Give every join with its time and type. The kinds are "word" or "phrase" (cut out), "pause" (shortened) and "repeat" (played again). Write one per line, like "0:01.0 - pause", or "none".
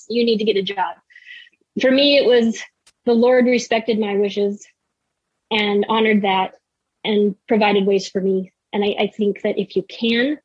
none